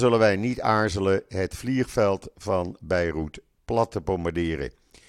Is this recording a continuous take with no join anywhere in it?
yes; 0 cuts

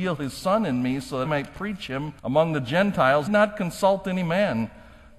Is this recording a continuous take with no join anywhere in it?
no; 3 cuts; at 1.2 s, 2.2 s, 3.3 s

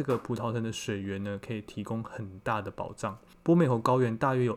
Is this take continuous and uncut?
no; 1 cut; at 3.3 s

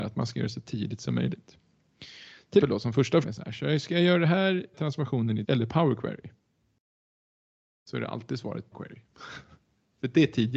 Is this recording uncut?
no; 5 cuts; at 2.6 s, 3.2 s, 4.7 s, 5.4 s, 8.7 s

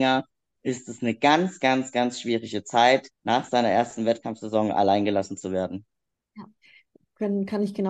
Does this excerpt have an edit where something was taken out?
yes; 1 cut; at 3.2 s

